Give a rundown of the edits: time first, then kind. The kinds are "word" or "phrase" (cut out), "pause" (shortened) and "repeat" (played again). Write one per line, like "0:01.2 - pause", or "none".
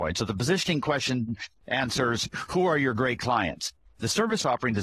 none